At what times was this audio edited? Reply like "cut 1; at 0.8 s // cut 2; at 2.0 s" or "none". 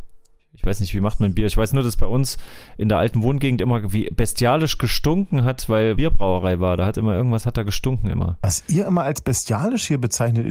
cut 1; at 5.9 s

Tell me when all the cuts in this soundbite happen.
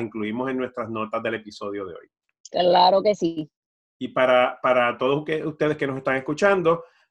none

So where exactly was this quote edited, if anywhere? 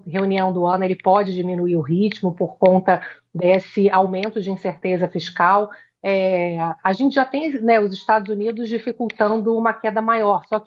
none

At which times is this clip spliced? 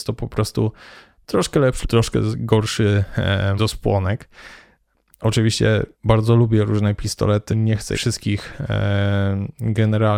cut 1; at 1.8 s // cut 2; at 3.6 s // cut 3; at 5.9 s // cut 4; at 7.5 s // cut 5; at 7.9 s

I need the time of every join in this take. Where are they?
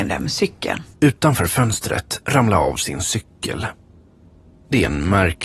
cut 1; at 0.9 s // cut 2; at 2.2 s

